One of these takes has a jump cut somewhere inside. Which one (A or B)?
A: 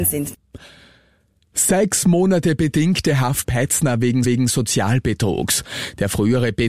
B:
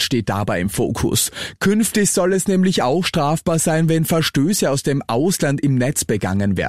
A